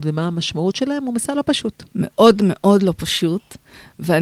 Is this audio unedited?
yes; 0 cuts

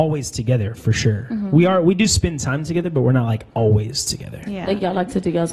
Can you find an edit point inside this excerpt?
no; 0 cuts

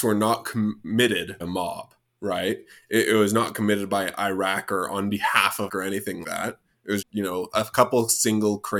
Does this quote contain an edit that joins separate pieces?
yes; 4 cuts; at 1.4 s, 5.7 s, 6.2 s, 7.0 s

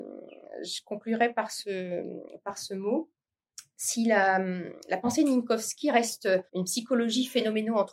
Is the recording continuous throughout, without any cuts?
no; 1 cut; at 6.5 s

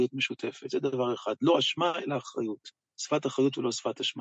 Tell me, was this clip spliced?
no; 0 cuts

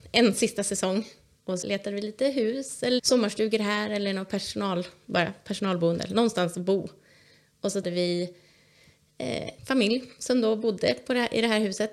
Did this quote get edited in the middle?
yes; 4 cuts; at 1.6 s, 3.0 s, 7.8 s, 9.6 s

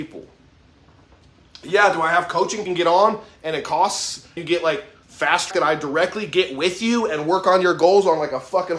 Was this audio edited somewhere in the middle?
yes; 3 cuts; at 2.7 s, 4.4 s, 5.5 s

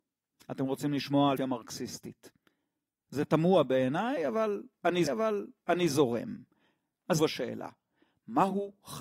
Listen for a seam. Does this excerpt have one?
yes; 3 cuts; at 1.4 s, 5.1 s, 7.2 s

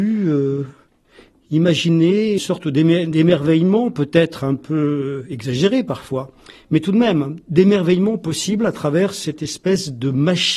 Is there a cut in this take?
yes; 1 cut; at 2.4 s

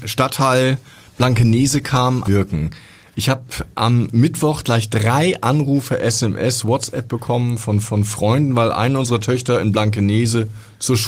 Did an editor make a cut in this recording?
yes; 2 cuts; at 2.2 s, 7.8 s

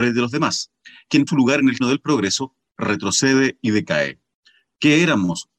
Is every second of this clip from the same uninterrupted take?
no; 2 cuts; at 1.3 s, 1.8 s

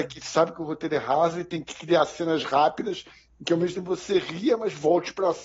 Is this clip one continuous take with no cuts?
yes; 0 cuts

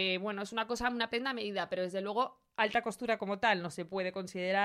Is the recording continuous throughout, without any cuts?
yes; 0 cuts

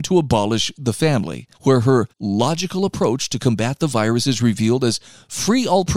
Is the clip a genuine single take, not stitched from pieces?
no; 2 cuts; at 1.5 s, 2.1 s

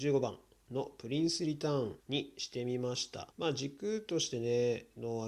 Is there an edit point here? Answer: yes; 2 cuts; at 2.0 s, 3.3 s

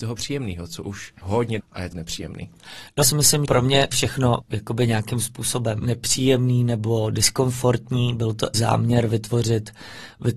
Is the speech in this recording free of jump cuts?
no; 9 cuts; at 1.2 s, 1.6 s, 1.9 s, 3.0 s, 3.4 s, 3.9 s, 4.4 s, 5.8 s, 8.5 s

